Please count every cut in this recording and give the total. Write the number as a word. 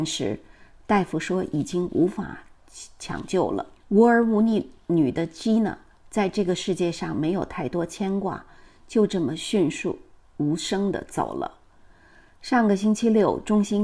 one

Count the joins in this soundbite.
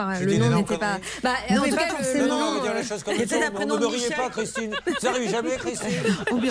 one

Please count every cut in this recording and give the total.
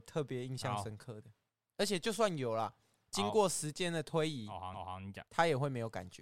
two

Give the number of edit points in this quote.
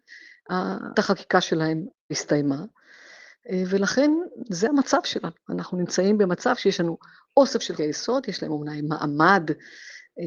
three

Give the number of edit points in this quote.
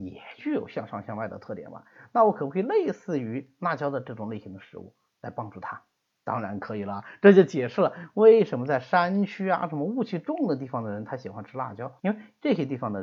three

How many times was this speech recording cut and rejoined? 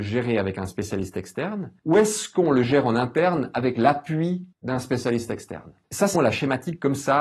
two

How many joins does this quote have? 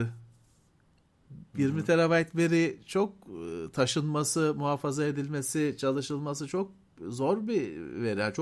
zero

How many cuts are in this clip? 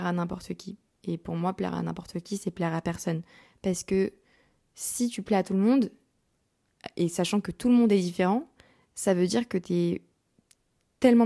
zero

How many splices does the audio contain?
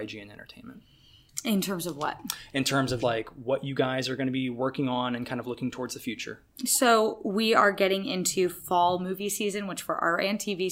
one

